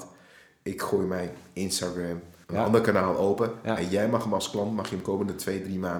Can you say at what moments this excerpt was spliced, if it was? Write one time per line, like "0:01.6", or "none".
0:02.4